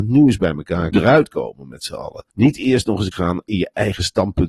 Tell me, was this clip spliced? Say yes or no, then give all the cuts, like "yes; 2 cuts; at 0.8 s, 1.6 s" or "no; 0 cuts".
yes; 3 cuts; at 0.9 s, 2.3 s, 3.1 s